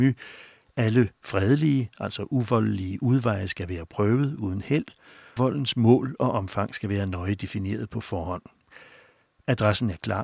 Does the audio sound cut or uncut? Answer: cut